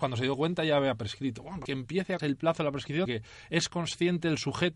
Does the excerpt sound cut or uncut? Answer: cut